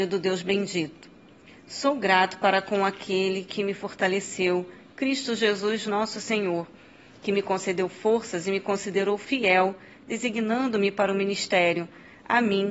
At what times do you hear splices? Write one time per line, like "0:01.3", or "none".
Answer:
none